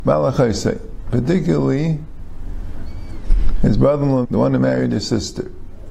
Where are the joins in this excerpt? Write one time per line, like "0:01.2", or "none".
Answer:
0:04.2